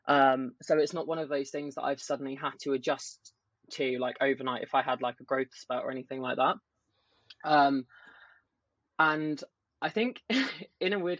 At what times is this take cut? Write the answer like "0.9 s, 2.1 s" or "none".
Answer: none